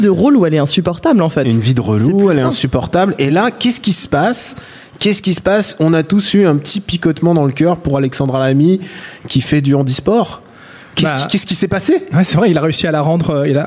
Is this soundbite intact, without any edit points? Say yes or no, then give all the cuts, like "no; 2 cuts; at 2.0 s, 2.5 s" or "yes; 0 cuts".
yes; 0 cuts